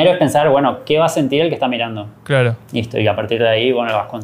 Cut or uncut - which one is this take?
cut